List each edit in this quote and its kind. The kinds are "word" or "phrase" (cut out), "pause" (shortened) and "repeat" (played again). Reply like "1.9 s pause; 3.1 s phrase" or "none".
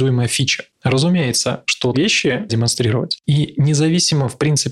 1.9 s word; 2.5 s word

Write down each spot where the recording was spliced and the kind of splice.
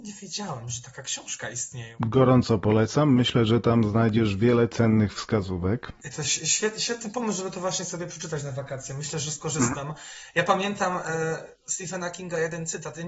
11.6 s pause

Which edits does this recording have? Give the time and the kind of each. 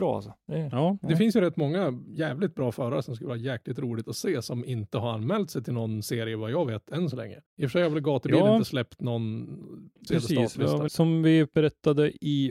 7.5 s pause; 10.1 s word; 10.9 s phrase

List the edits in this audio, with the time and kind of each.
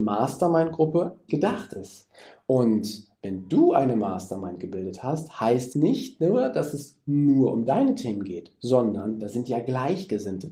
1.3 s word; 5.7 s word

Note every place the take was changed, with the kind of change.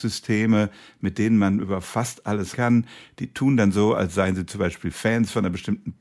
2.5 s word

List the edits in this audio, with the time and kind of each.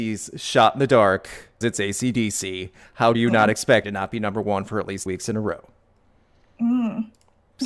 1.6 s word; 3.1 s word; 3.8 s word; 5.1 s word

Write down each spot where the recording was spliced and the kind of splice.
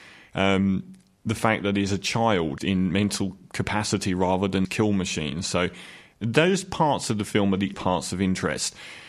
2.6 s word; 4.6 s word; 7.7 s word

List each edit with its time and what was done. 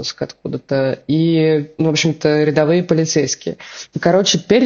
none

